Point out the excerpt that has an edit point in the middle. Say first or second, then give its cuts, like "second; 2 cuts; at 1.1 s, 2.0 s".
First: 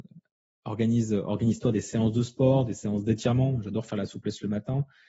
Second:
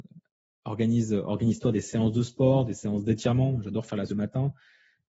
second; 1 cut; at 4.1 s